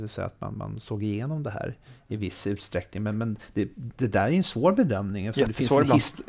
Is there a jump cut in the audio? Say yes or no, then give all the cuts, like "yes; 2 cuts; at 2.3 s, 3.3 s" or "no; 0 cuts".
no; 0 cuts